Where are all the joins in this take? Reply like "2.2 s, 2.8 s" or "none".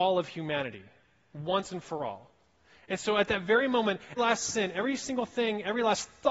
4.2 s